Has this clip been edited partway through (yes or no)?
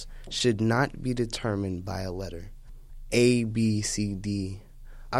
no